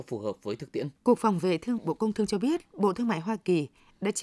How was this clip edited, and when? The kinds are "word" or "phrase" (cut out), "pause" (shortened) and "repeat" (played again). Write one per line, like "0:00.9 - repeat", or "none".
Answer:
0:01.0 - pause
0:01.8 - word